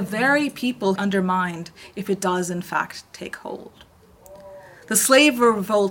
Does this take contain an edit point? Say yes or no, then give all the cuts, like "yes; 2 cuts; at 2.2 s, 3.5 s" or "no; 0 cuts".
yes; 1 cut; at 1.0 s